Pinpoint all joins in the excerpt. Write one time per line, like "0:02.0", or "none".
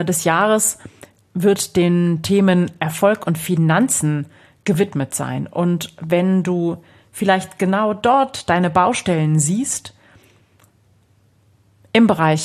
none